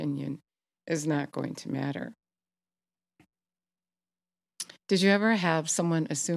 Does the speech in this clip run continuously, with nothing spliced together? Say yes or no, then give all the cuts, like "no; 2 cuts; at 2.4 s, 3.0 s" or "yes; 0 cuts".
no; 1 cut; at 4.8 s